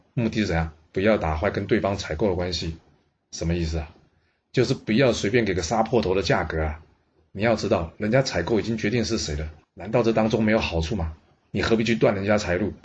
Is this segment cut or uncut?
uncut